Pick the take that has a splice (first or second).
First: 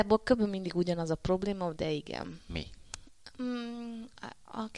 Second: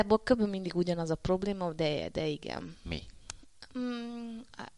first